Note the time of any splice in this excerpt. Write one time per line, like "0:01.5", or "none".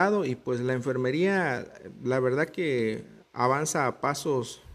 none